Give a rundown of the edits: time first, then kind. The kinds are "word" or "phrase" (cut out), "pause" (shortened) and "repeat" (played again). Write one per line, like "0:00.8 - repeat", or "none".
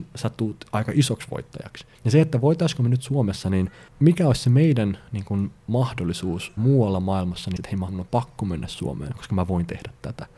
0:01.9 - pause
0:03.9 - pause
0:06.6 - word
0:07.6 - word
0:07.9 - phrase